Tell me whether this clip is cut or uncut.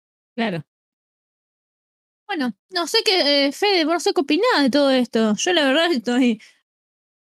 uncut